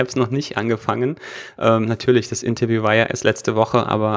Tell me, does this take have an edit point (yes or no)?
no